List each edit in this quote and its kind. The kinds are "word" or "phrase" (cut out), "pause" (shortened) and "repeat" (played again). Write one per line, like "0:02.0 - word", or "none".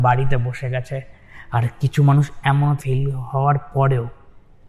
0:02.8 - word